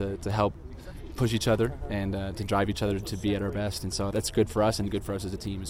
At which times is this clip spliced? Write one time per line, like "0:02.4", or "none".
0:01.1
0:04.1